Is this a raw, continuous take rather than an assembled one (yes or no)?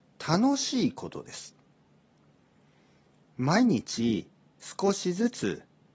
yes